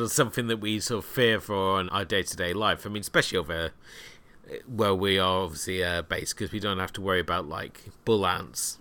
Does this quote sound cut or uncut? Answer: cut